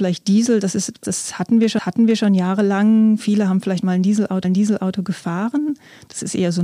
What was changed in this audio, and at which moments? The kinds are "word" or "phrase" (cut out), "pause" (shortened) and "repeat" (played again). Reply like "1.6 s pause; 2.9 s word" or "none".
1.0 s word; 1.8 s repeat; 4.4 s repeat